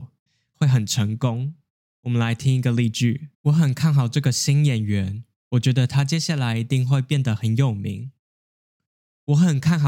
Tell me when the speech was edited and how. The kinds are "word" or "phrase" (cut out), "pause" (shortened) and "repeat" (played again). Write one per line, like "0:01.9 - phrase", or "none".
0:01.8 - pause
0:03.3 - pause